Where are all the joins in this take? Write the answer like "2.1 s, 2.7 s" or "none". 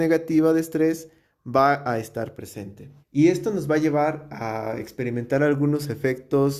3.0 s